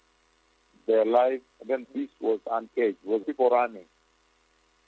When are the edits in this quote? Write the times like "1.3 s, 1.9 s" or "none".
1.5 s, 1.8 s, 3.2 s